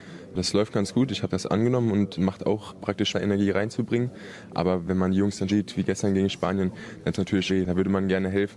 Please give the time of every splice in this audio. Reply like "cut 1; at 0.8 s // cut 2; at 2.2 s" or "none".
cut 1; at 1.3 s // cut 2; at 2.1 s // cut 3; at 3.1 s // cut 4; at 5.5 s // cut 5; at 7.1 s // cut 6; at 7.5 s